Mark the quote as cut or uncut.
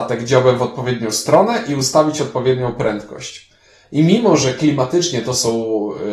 uncut